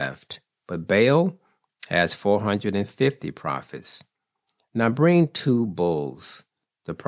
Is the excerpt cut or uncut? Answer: uncut